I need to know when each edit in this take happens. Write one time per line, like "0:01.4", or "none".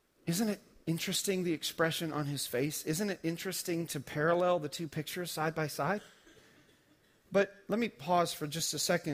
none